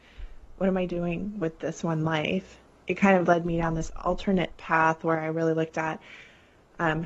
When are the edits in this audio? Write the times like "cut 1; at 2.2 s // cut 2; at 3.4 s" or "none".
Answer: none